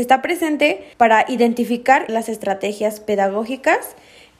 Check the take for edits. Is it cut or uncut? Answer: cut